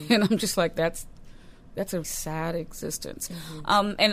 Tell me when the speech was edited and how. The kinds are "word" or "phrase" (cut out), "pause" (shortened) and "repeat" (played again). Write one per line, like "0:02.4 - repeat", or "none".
0:02.0 - word